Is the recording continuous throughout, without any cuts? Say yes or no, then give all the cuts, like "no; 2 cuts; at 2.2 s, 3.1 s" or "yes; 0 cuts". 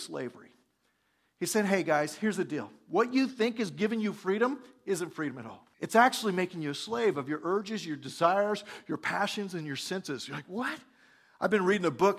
no; 1 cut; at 5.7 s